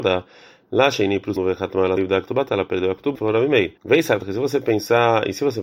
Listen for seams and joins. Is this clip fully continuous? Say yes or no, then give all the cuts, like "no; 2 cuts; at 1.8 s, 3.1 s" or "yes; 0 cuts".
no; 5 cuts; at 1.4 s, 2.0 s, 3.1 s, 3.8 s, 4.2 s